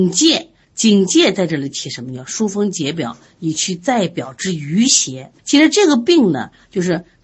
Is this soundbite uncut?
no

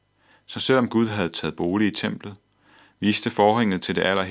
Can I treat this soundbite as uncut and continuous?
yes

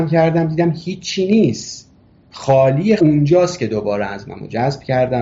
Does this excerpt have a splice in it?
yes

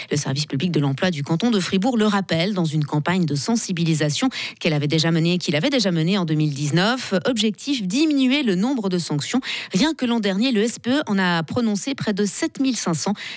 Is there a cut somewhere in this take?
no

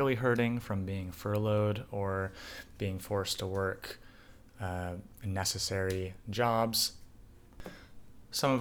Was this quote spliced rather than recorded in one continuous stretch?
no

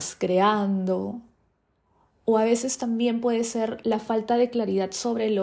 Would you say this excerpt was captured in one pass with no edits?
yes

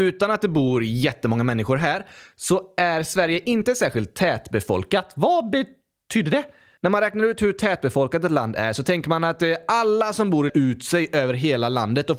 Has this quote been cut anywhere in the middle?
yes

